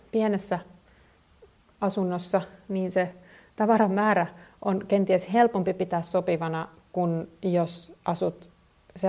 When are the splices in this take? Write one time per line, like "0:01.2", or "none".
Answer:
none